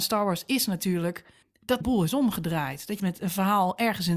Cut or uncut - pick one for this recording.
cut